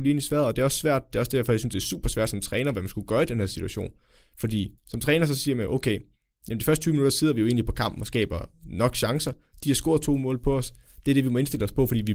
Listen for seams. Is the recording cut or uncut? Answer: cut